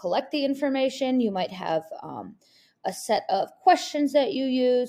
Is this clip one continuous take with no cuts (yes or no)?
yes